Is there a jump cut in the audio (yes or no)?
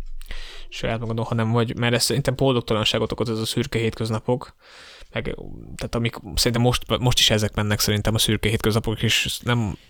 no